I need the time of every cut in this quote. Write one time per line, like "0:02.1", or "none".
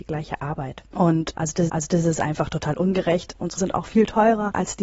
0:01.7
0:03.6

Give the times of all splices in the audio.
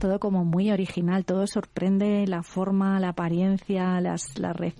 none

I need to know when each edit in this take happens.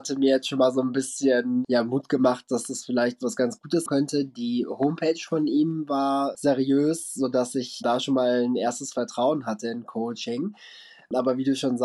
0:03.9

